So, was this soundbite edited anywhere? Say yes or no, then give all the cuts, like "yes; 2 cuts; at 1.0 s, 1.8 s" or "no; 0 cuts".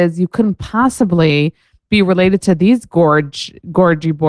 no; 0 cuts